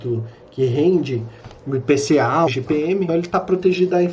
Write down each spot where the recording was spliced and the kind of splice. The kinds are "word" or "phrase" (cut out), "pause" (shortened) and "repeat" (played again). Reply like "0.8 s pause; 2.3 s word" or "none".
2.5 s word; 3.1 s word